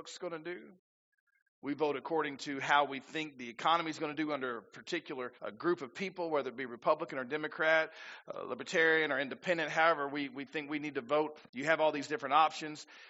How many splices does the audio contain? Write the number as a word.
two